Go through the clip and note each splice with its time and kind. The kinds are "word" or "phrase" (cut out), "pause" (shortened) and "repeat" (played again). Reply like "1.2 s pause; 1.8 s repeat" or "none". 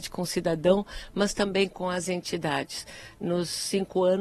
none